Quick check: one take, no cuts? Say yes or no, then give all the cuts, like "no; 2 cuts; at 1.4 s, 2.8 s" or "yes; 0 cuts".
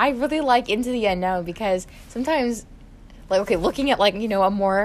yes; 0 cuts